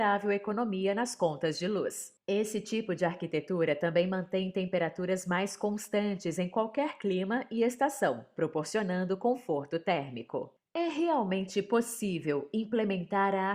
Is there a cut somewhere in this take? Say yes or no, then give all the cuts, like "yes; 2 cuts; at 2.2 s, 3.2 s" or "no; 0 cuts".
no; 0 cuts